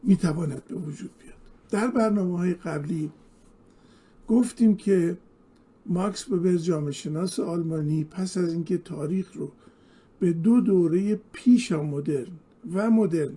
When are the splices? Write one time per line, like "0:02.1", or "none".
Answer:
none